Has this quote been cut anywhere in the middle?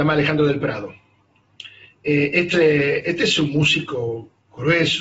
yes; 1 cut; at 2.5 s

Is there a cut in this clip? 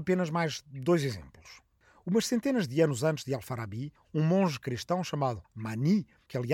yes; 1 cut; at 5.4 s

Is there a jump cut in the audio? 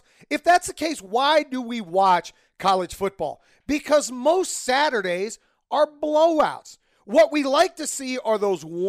no; 0 cuts

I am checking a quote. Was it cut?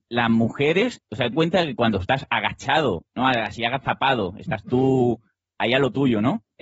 yes; 1 cut; at 1.3 s

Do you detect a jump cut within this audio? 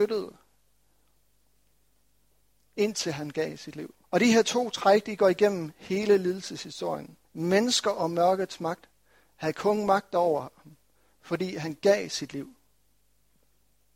yes; 2 cuts; at 4.0 s, 7.2 s

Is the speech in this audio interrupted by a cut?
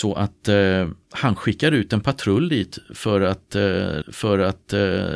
yes; 2 cuts; at 1.0 s, 4.0 s

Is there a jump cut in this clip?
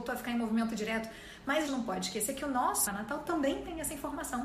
yes; 2 cuts; at 1.7 s, 2.9 s

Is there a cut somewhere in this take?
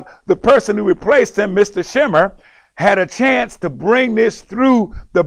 no; 0 cuts

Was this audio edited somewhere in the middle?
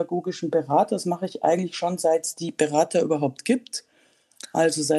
no; 0 cuts

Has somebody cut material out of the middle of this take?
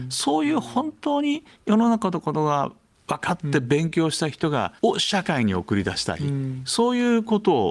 yes; 2 cuts; at 2.9 s, 4.8 s

